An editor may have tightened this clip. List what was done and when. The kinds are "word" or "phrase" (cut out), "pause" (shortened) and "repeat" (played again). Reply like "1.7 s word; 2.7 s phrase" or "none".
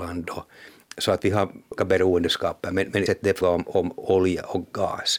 1.2 s word; 1.8 s word; 3.1 s word; 3.4 s word